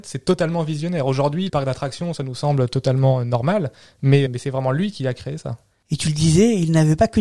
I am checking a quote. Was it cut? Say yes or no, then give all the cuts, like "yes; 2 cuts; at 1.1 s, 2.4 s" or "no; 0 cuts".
yes; 2 cuts; at 1.5 s, 4.3 s